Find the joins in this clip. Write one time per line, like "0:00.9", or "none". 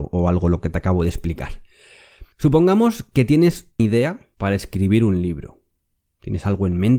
0:02.3
0:03.8
0:04.3